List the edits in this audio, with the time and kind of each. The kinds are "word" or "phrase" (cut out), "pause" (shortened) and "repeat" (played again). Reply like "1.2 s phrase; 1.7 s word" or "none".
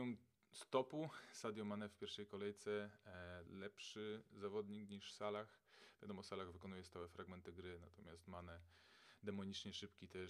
3.5 s phrase